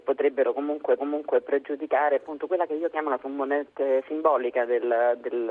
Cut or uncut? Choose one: cut